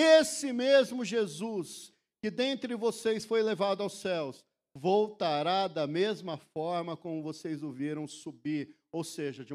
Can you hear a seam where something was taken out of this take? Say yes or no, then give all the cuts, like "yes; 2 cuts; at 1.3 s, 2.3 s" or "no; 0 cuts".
no; 0 cuts